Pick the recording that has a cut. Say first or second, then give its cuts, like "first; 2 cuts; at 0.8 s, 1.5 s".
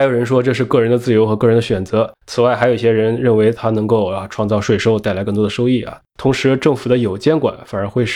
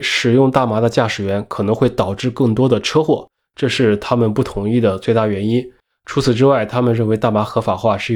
first; 2 cuts; at 2.1 s, 6.1 s